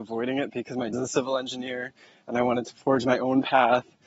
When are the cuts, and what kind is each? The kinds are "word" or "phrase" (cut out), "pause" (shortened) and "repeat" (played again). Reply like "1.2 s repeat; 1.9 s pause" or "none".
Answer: 0.9 s word